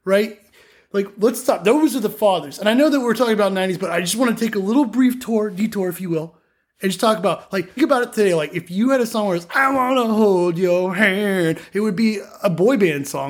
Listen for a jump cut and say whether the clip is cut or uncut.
cut